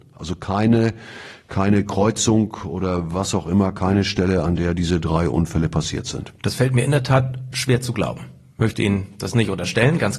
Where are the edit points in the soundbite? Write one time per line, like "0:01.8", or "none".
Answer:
none